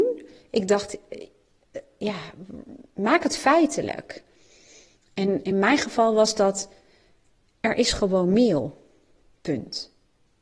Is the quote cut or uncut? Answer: uncut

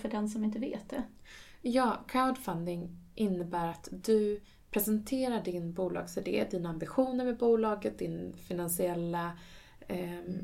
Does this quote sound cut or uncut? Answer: uncut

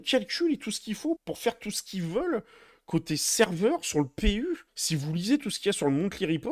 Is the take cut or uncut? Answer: cut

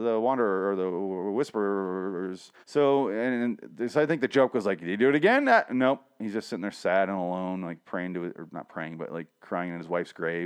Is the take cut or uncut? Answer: cut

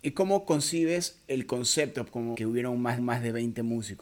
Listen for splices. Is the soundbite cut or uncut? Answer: cut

